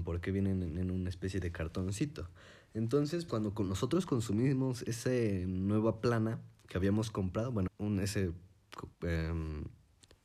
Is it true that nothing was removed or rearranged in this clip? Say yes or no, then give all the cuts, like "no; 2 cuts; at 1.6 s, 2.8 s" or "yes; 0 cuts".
no; 3 cuts; at 3.3 s, 7.7 s, 8.9 s